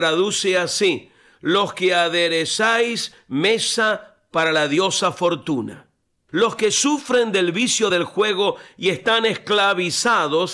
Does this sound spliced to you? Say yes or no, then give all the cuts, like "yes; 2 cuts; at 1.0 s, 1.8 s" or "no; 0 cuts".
no; 0 cuts